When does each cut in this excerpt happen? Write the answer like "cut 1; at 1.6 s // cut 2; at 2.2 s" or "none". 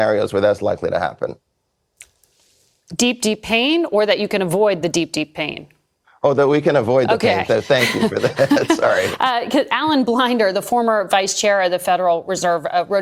none